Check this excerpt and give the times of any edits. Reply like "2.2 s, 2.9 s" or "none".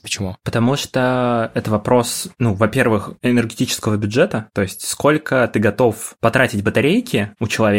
none